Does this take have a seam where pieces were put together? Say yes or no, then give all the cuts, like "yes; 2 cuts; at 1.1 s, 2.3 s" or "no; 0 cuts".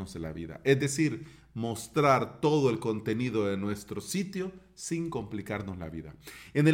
no; 0 cuts